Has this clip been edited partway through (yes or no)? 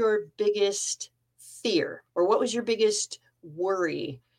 yes